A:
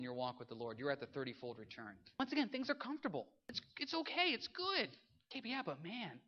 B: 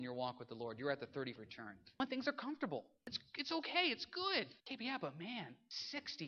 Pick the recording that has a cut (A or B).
B